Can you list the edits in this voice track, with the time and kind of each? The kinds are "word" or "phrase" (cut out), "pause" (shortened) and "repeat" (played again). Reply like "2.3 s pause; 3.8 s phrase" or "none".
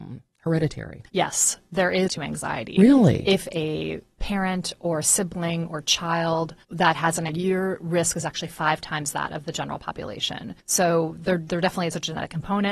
1.1 s pause; 2.1 s phrase; 3.4 s phrase; 4.1 s pause; 6.6 s pause; 7.3 s phrase; 10.6 s pause

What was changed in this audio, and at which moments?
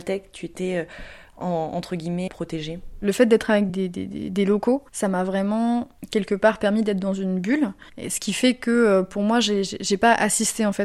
2.3 s word; 3.7 s word

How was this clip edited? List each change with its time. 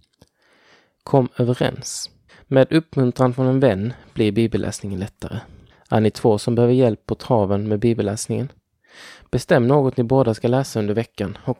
2.3 s pause; 5.7 s pause

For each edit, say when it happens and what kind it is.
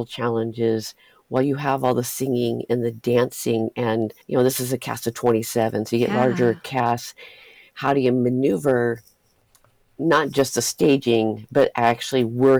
4.2 s pause

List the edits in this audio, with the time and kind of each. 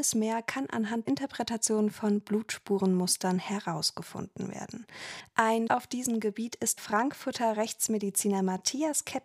1.1 s word; 5.7 s word; 6.8 s word

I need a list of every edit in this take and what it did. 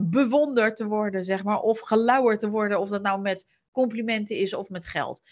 none

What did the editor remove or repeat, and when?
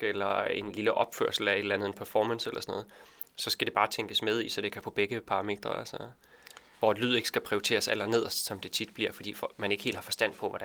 4.8 s word

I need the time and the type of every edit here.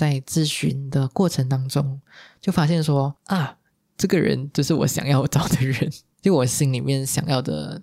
3.2 s pause

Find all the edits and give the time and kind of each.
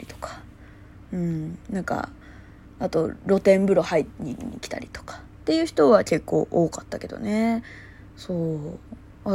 1.6 s pause

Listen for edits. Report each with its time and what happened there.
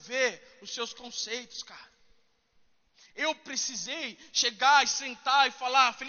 none

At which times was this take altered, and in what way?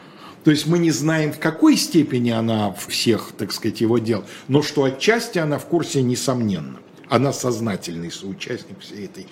2.9 s word

